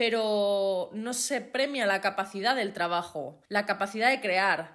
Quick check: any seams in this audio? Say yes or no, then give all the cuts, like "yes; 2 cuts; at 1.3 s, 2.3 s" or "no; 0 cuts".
yes; 1 cut; at 3.4 s